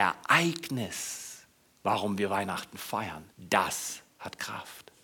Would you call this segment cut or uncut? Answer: cut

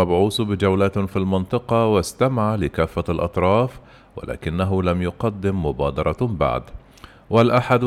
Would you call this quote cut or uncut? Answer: uncut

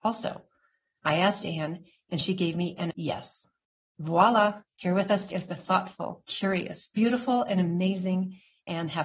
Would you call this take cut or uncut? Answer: cut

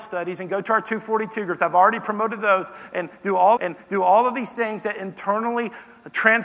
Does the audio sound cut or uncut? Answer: cut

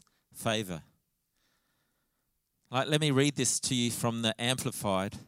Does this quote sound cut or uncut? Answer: uncut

